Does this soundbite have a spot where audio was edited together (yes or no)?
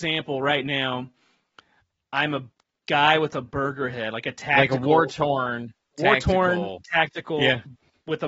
no